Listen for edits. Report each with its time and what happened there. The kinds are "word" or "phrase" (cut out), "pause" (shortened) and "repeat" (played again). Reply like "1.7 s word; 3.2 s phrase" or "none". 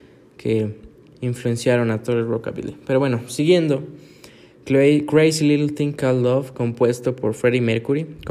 none